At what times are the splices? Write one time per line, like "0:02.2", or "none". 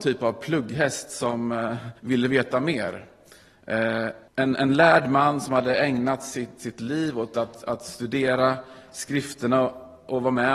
0:02.0
0:04.3

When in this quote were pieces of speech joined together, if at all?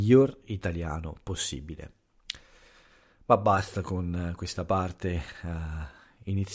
none

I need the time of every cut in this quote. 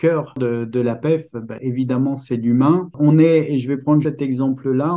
0:04.0

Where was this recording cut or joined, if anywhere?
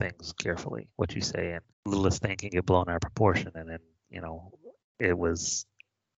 0:00.9
0:01.7

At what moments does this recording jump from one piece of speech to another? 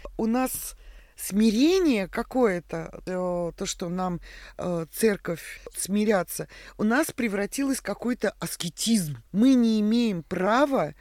0:05.7
0:09.3

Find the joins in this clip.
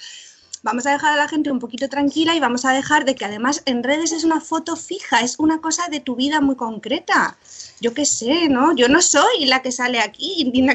0:03.2

